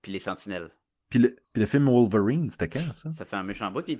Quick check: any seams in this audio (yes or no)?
yes